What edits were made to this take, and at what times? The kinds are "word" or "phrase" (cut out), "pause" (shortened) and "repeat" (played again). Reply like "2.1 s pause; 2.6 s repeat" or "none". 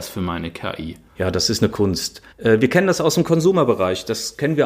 1.1 s pause; 1.7 s word; 2.3 s pause